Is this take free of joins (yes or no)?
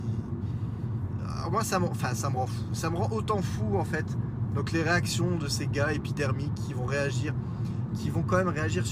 yes